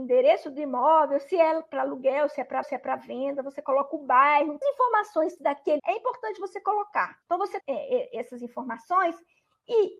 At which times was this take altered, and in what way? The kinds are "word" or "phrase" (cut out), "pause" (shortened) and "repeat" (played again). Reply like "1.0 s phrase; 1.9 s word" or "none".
2.6 s repeat; 4.6 s phrase; 5.4 s word; 5.8 s word; 7.2 s pause; 7.6 s word